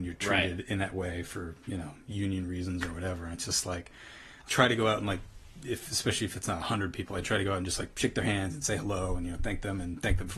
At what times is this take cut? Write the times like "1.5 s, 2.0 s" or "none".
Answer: 4.5 s